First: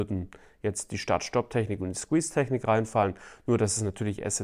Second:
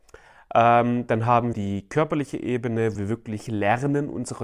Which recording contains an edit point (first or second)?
second